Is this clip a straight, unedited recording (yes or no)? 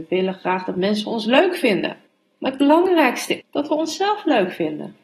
no